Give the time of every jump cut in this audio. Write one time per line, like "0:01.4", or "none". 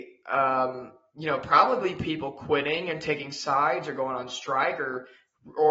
none